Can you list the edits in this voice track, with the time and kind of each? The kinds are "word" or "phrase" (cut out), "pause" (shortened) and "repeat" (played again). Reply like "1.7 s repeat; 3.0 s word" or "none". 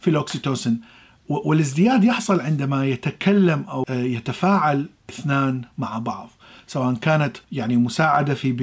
7.4 s pause